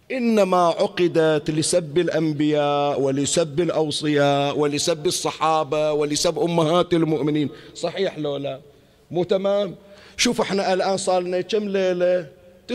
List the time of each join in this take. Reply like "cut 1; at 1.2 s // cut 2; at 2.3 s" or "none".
none